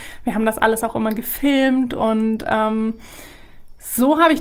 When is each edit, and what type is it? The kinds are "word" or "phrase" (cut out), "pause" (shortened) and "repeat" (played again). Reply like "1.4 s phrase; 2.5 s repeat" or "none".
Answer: none